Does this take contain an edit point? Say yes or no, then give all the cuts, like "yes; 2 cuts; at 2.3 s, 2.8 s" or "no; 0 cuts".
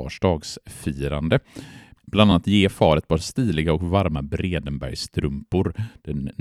no; 0 cuts